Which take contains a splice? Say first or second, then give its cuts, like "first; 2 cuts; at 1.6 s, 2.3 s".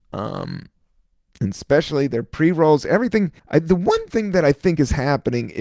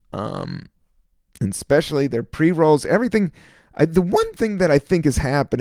first; 1 cut; at 3.4 s